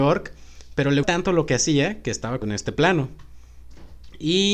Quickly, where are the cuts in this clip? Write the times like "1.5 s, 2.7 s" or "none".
1.0 s, 2.4 s